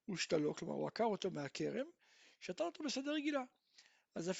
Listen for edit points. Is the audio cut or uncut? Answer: uncut